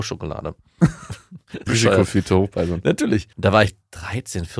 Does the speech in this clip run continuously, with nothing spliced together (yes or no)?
no